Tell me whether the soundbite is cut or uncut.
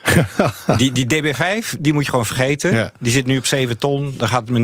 uncut